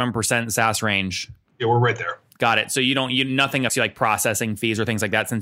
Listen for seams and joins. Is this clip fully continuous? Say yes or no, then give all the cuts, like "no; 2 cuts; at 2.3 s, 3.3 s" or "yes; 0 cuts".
no; 1 cut; at 3.7 s